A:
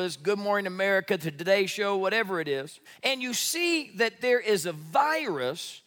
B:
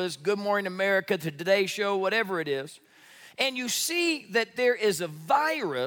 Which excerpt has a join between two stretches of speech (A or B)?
A